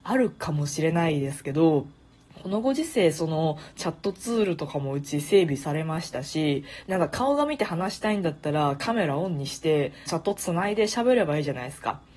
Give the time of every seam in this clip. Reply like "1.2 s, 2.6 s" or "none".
2.0 s, 10.1 s